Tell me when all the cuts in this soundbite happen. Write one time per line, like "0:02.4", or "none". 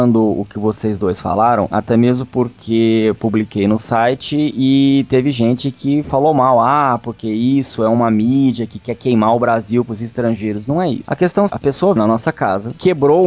0:11.5
0:12.0